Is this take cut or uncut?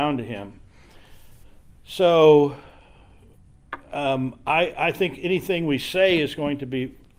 uncut